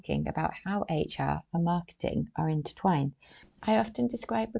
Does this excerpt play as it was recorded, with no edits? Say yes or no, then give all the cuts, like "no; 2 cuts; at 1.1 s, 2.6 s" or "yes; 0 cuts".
yes; 0 cuts